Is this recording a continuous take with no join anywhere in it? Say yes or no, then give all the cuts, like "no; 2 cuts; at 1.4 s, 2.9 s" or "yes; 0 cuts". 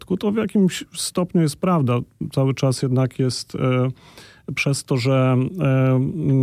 yes; 0 cuts